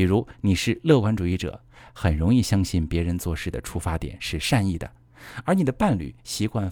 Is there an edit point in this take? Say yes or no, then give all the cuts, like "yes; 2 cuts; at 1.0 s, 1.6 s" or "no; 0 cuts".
no; 0 cuts